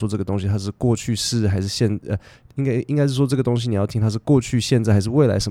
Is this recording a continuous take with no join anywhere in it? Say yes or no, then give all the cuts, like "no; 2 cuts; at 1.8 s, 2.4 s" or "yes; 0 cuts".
yes; 0 cuts